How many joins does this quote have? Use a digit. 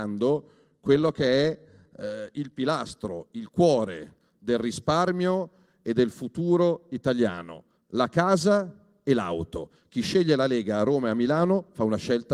0